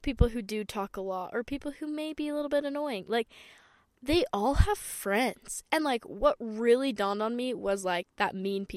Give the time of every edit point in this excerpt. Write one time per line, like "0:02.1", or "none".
none